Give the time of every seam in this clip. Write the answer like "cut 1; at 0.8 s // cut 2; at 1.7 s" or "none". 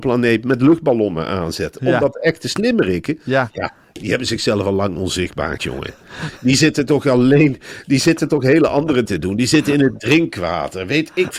cut 1; at 5.6 s // cut 2; at 9.1 s